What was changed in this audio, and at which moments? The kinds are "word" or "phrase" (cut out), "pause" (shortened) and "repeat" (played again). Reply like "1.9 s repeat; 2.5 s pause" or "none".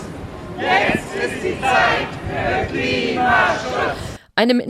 none